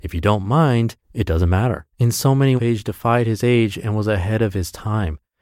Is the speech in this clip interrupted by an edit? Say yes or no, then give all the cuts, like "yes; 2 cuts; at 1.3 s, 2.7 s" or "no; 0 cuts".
yes; 3 cuts; at 1.0 s, 1.9 s, 2.6 s